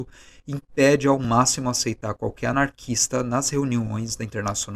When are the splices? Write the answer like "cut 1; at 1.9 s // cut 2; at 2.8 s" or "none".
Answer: none